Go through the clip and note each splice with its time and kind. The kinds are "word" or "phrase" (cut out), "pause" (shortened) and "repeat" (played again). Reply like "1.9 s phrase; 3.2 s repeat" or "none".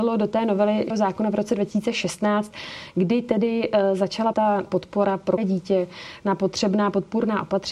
0.9 s word; 4.3 s word; 4.7 s word; 5.4 s word